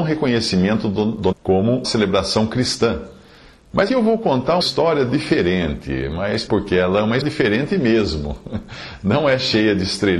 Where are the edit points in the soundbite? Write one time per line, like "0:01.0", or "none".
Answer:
0:01.3
0:01.8
0:03.9
0:04.6
0:05.1
0:06.5
0:07.2